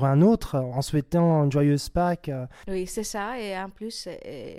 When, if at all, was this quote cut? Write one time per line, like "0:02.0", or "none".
none